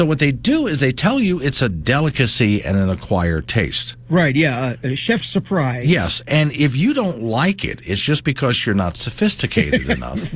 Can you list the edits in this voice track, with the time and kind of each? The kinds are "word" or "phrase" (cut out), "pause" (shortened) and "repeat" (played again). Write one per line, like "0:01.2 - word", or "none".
none

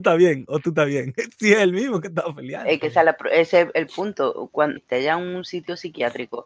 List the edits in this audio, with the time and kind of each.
0:04.8 - phrase

